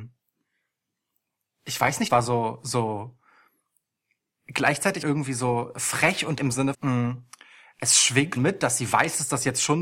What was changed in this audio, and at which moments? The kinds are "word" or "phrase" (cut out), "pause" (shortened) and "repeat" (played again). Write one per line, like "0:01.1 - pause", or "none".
0:02.1 - word
0:05.0 - word
0:06.4 - word
0:06.7 - word
0:08.4 - word

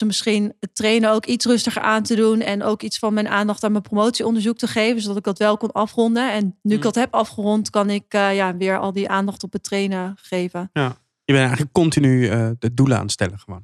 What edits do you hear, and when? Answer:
none

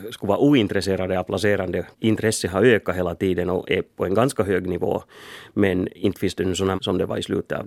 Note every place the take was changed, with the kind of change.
0:01.9 - pause
0:06.7 - word

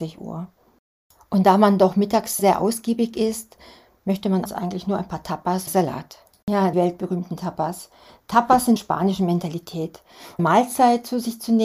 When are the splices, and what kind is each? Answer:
0:02.4 - word
0:04.4 - word
0:05.7 - word
0:06.7 - word
0:08.8 - phrase
0:10.4 - phrase

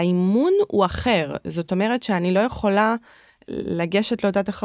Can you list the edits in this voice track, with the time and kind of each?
none

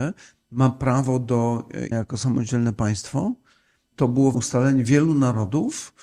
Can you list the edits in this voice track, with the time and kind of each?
0:01.9 - word
0:03.9 - word
0:04.3 - word

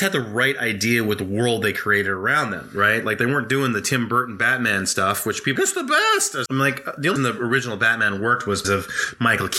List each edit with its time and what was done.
0:05.6 - word
0:06.5 - word
0:07.2 - word
0:08.6 - word

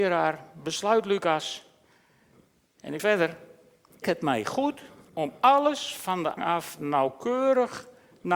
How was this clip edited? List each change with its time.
0:03.0 - word
0:04.0 - word
0:05.0 - pause
0:06.4 - word

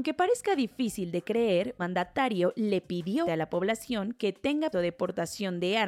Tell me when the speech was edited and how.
0:01.8 - word
0:03.2 - word
0:04.7 - word

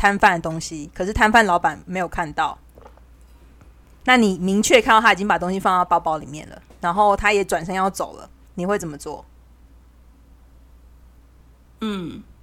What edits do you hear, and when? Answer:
0:08.5 - pause

